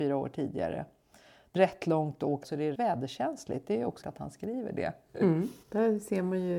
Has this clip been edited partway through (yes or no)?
yes